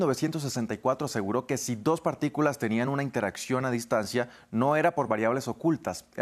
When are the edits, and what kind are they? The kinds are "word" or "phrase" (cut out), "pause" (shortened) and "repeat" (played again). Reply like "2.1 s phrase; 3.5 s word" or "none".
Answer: none